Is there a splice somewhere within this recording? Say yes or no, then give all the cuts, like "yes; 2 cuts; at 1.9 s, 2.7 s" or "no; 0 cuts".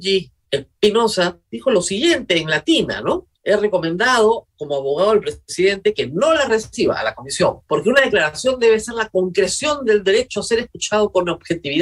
yes; 3 cuts; at 1.4 s, 3.3 s, 7.6 s